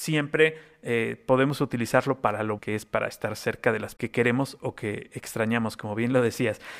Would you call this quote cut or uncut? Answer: cut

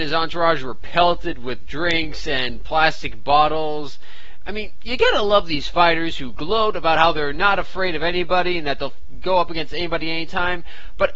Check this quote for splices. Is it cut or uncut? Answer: uncut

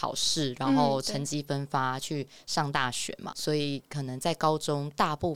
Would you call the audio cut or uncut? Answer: cut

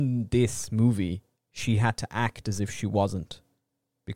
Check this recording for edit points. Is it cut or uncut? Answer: uncut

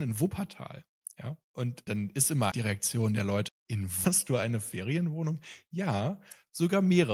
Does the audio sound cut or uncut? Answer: cut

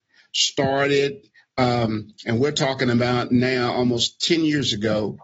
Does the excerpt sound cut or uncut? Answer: uncut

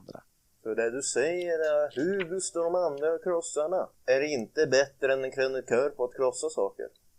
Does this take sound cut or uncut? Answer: cut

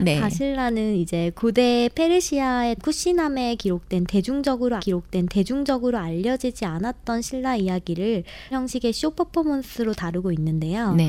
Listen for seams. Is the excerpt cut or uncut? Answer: cut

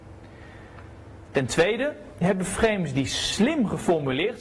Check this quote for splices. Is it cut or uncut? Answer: uncut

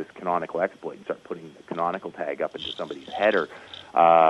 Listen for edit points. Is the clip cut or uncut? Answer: uncut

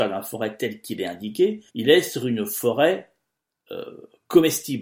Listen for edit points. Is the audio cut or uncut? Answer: cut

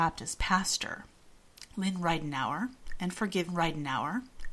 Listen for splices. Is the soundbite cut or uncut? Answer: cut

